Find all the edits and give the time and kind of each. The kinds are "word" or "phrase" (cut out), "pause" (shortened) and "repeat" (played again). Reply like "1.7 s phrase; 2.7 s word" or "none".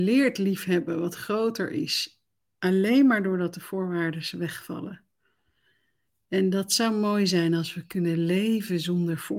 none